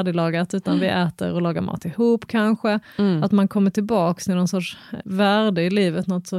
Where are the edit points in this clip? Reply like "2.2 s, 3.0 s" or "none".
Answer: 5.0 s